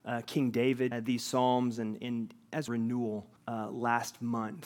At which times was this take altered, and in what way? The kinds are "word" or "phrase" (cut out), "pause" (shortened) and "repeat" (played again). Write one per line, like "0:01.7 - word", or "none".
0:00.9 - phrase
0:02.0 - word
0:02.7 - phrase
0:03.4 - pause